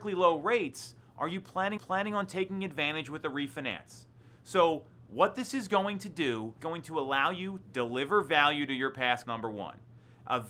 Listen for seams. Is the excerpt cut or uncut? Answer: cut